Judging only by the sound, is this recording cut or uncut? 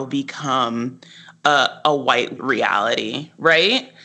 cut